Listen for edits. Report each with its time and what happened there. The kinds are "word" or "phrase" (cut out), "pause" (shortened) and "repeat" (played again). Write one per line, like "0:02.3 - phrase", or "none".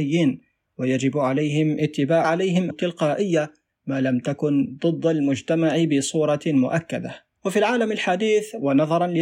0:02.2 - phrase
0:02.7 - word
0:07.4 - pause

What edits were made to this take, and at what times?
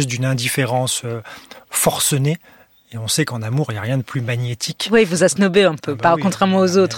none

